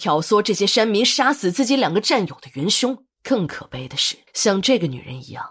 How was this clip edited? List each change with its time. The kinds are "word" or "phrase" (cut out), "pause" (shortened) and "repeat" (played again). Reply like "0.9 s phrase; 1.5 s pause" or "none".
3.1 s pause; 4.3 s pause